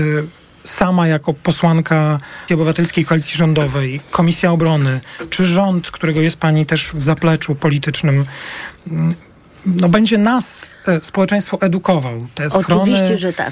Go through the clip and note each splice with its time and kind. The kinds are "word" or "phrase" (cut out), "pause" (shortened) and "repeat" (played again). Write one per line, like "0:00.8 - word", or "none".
0:02.5 - word